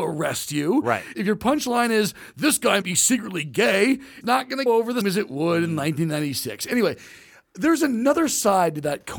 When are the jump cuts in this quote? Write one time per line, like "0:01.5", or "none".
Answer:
0:02.8
0:04.2
0:04.7
0:05.0